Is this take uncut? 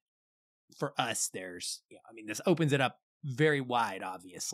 no; 1 cut; at 3.1 s

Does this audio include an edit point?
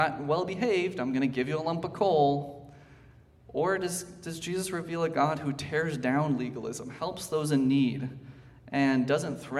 no; 0 cuts

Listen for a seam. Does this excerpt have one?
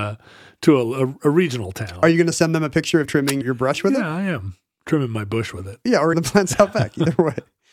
yes; 3 cuts; at 3.0 s, 3.4 s, 6.1 s

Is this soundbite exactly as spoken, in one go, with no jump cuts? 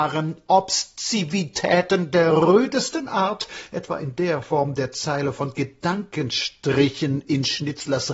yes; 0 cuts

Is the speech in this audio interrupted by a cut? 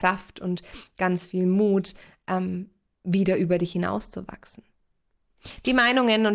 no; 0 cuts

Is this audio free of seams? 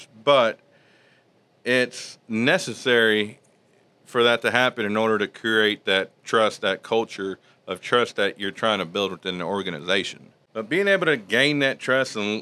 yes; 0 cuts

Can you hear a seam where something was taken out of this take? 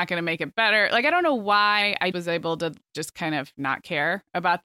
yes; 2 cuts; at 2.1 s, 2.9 s

